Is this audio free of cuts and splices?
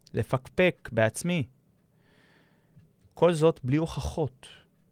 yes; 0 cuts

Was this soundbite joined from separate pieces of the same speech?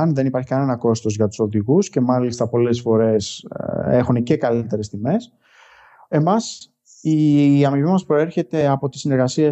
no; 0 cuts

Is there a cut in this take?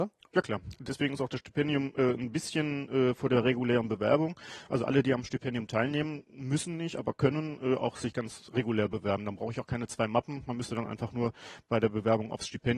no; 0 cuts

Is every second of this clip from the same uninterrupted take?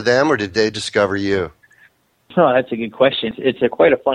yes; 0 cuts

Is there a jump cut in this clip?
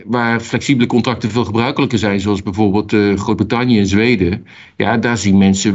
no; 0 cuts

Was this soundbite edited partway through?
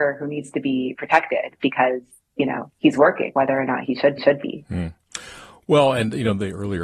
yes; 1 cut; at 4.2 s

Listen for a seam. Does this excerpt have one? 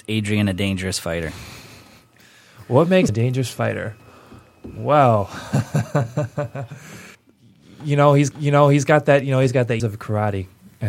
yes; 4 cuts; at 3.1 s, 7.1 s, 8.3 s, 9.8 s

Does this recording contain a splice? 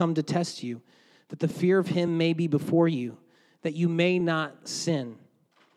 no; 0 cuts

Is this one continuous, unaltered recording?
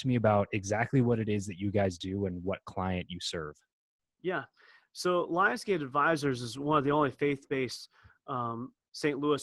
yes; 0 cuts

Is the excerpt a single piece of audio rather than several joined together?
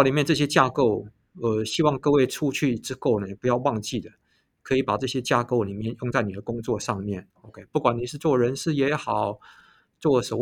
no; 1 cut; at 7.3 s

